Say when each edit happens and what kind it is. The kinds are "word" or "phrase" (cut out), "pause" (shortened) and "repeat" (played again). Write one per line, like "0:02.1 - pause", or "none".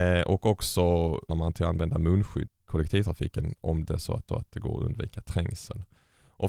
0:01.3 - word
0:02.5 - word
0:03.9 - word
0:04.3 - repeat

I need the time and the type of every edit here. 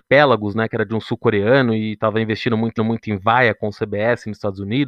0:02.8 - repeat

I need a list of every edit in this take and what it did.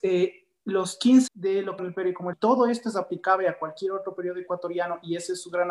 0:01.3 - word
0:01.8 - phrase
0:02.3 - phrase

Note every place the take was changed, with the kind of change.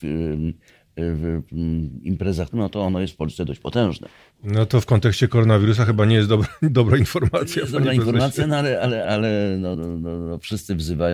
0:02.5 - word
0:09.0 - word
0:09.7 - word

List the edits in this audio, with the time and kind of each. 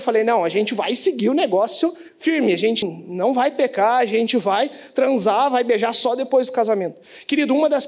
0:02.1 - pause
0:02.8 - word

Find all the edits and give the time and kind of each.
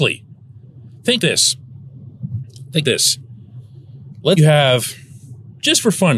0:01.2 - word
0:02.8 - word
0:04.4 - phrase

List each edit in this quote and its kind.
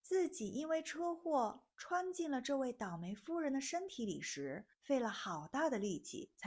0:04.7 - pause

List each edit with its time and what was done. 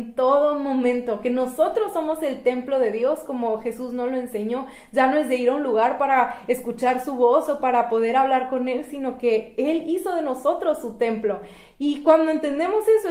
none

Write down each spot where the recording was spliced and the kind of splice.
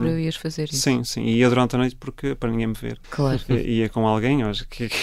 0:03.0 - pause

